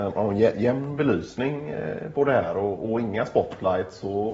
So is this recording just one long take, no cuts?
yes; 0 cuts

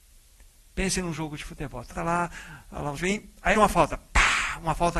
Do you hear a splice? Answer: yes; 3 cuts; at 1.9 s, 3.0 s, 3.6 s

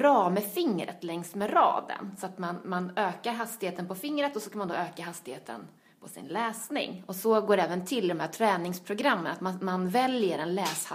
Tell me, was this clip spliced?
no; 0 cuts

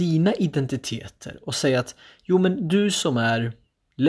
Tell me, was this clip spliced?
no; 0 cuts

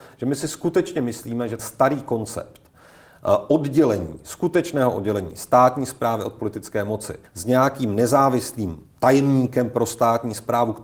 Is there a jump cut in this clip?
yes; 3 cuts; at 1.6 s, 7.3 s, 8.9 s

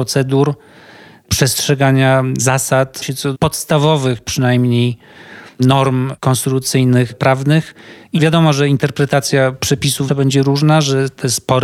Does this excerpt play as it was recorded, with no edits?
no; 3 cuts; at 3.0 s, 3.3 s, 10.1 s

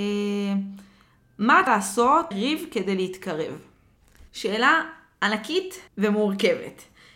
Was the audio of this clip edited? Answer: yes; 4 cuts; at 1.7 s, 2.3 s, 4.3 s, 5.9 s

